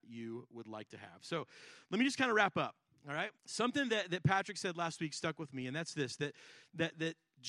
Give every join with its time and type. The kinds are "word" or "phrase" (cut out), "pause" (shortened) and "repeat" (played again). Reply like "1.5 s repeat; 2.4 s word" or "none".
3.4 s pause